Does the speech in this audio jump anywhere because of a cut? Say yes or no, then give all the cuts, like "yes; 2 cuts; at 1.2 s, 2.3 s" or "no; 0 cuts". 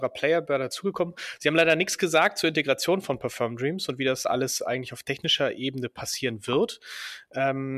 no; 0 cuts